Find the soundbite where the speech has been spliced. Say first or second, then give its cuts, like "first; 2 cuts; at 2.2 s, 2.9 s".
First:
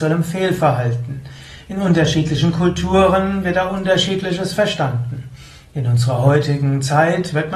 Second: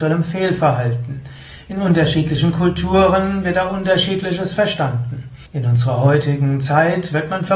second; 1 cut; at 5.5 s